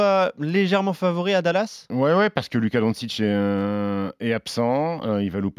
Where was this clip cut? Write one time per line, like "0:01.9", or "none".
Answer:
none